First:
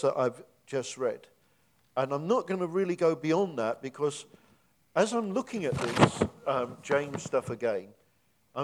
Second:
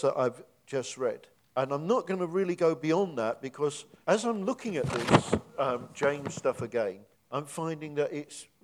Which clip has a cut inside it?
second; 3 cuts; at 1.3 s, 4.0 s, 7.1 s

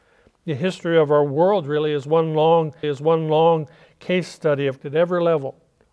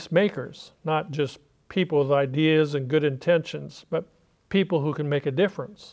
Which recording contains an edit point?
first; 2 cuts; at 2.8 s, 4.8 s

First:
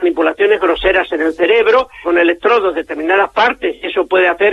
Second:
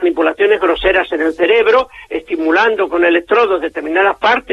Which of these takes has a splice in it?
first; 1 cut; at 2.0 s

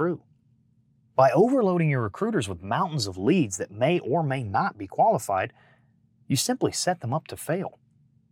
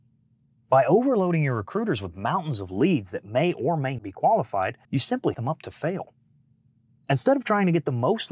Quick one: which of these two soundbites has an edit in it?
second; 3 cuts; at 4.0 s, 4.8 s, 5.3 s

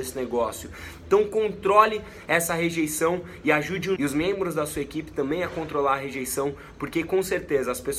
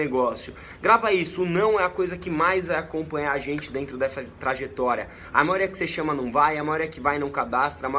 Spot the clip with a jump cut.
first; 1 cut; at 4.0 s

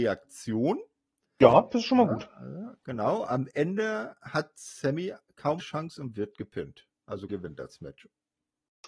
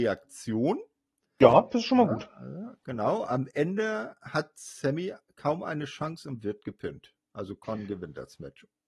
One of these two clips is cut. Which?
first; 2 cuts; at 5.6 s, 7.3 s

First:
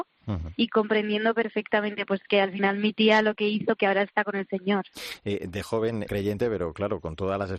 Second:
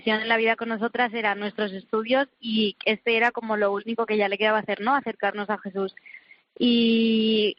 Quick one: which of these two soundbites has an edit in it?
first; 2 cuts; at 3.8 s, 6.1 s

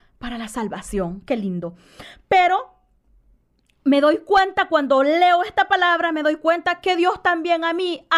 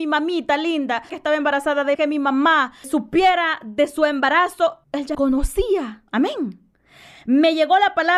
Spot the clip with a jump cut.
second; 6 cuts; at 1.1 s, 1.9 s, 2.8 s, 4.8 s, 5.1 s, 6.1 s

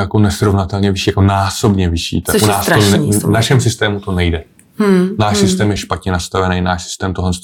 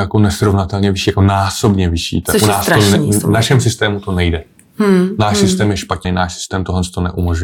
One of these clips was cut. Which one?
second; 1 cut; at 6.0 s

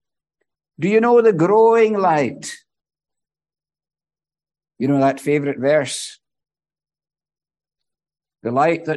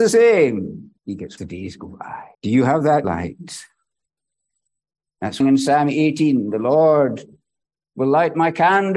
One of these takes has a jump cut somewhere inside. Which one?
second; 5 cuts; at 1.0 s, 1.4 s, 2.3 s, 3.0 s, 5.4 s

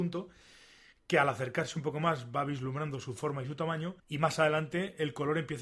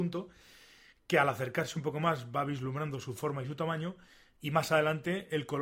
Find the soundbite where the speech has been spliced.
first; 1 cut; at 4.0 s

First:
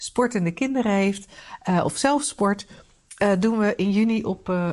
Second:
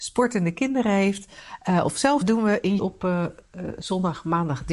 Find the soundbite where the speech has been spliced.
second; 2 cuts; at 2.2 s, 2.8 s

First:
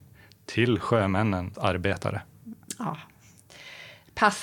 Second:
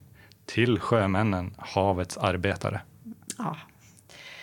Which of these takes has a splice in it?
first; 1 cut; at 1.5 s

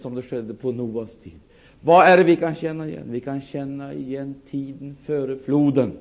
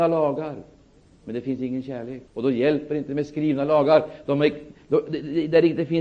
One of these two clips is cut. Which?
second; 1 cut; at 2.3 s

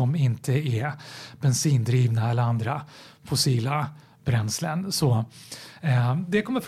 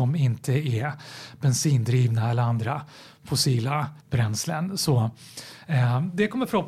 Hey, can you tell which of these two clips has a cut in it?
second; 1 cut; at 4.0 s

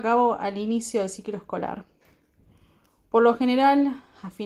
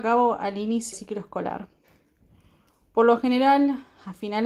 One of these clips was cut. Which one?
second; 1 cut; at 0.9 s

